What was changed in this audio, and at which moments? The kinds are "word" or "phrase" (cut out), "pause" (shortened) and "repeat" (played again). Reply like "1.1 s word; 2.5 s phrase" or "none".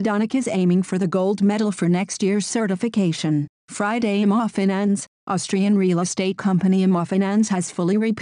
none